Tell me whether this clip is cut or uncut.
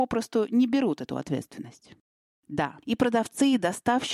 uncut